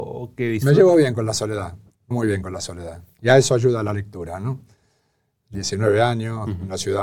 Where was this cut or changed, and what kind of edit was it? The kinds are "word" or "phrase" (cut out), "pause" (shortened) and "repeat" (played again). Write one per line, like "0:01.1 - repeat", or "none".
0:02.1 - word
0:05.5 - phrase